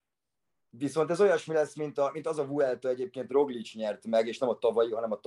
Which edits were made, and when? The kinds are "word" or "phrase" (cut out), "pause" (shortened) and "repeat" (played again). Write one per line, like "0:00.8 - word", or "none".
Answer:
0:03.3 - word